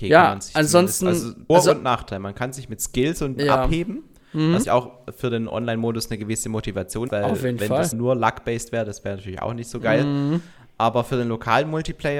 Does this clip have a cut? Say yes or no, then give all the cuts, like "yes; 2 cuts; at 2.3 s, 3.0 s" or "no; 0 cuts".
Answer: yes; 5 cuts; at 1.5 s, 3.4 s, 4.6 s, 7.1 s, 7.9 s